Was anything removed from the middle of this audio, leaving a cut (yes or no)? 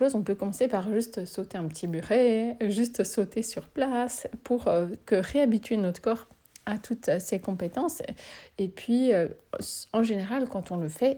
no